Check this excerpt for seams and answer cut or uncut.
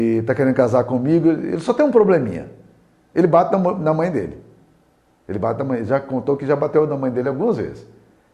uncut